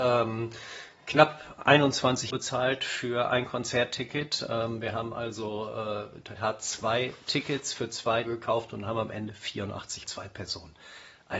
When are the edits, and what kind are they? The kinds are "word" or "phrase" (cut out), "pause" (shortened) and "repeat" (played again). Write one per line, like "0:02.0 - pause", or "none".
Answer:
0:02.3 - word
0:06.4 - phrase
0:08.3 - word
0:10.0 - phrase

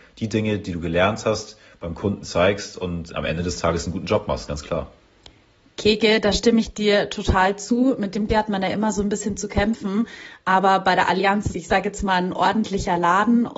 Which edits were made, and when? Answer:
0:03.1 - word
0:08.3 - word
0:11.5 - word

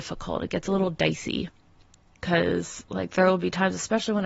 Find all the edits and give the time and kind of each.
none

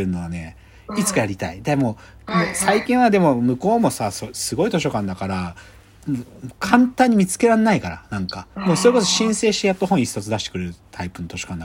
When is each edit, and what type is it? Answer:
0:08.5 - pause

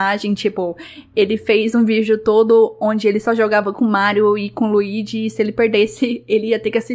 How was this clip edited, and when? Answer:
none

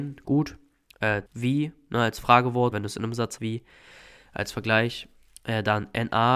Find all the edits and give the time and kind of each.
0:01.3 - phrase
0:02.7 - word
0:03.4 - word

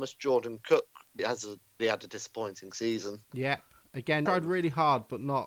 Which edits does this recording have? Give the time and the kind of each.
0:01.2 - word
0:01.8 - word
0:04.3 - word

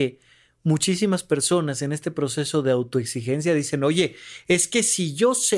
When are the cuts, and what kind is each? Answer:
none

